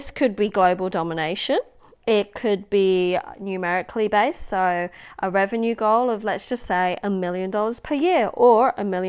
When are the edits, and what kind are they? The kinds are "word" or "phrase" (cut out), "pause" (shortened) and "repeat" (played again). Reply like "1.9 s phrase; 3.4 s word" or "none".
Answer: none

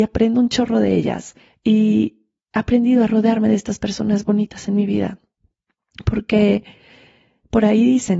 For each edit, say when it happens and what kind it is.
1.4 s pause

